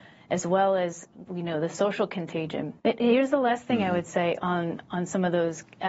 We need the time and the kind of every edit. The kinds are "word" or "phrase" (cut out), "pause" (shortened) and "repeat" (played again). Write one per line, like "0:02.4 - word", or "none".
0:02.8 - pause